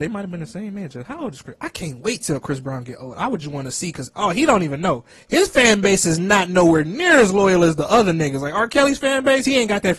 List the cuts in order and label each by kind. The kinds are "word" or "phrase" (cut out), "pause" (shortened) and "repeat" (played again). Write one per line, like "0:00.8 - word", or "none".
none